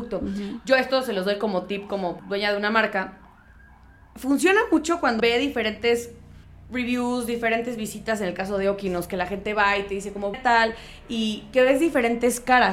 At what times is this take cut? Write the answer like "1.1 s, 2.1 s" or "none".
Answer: 2.2 s, 3.5 s, 5.2 s, 6.4 s, 10.3 s